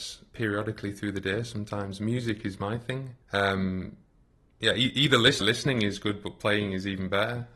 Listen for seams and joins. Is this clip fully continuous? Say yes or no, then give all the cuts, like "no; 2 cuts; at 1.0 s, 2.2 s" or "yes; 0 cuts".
no; 2 cuts; at 3.2 s, 5.4 s